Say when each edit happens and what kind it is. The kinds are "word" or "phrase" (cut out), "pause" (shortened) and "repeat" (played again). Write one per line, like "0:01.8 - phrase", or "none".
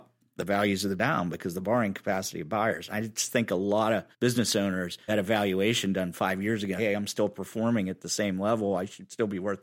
0:01.0 - phrase
0:04.1 - pause
0:05.1 - word
0:06.8 - phrase